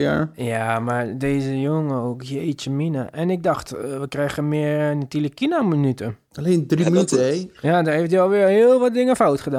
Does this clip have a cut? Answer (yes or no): no